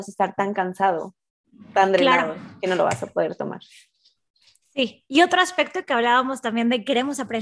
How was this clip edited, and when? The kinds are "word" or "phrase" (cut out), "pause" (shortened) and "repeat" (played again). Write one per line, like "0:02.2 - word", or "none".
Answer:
none